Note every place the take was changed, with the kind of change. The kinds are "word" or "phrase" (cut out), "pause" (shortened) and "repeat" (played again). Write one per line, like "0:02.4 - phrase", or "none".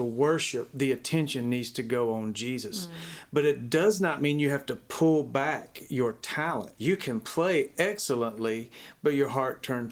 0:06.7 - word